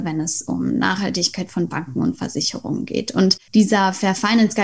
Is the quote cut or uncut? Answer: cut